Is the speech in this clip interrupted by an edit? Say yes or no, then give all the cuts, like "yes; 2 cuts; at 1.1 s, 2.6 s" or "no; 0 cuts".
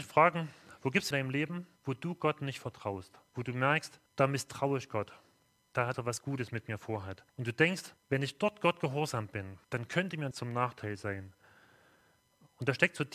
yes; 9 cuts; at 1.1 s, 1.8 s, 3.3 s, 4.1 s, 5.9 s, 7.3 s, 8.0 s, 9.6 s, 10.3 s